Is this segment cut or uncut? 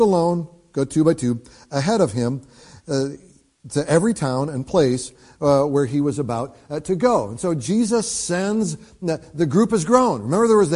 uncut